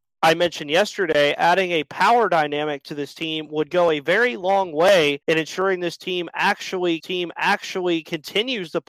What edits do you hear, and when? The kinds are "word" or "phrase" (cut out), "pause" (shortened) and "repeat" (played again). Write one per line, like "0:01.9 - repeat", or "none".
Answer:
0:05.2 - pause
0:07.0 - repeat